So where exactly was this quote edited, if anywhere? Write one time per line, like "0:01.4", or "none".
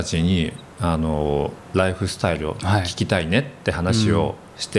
0:01.6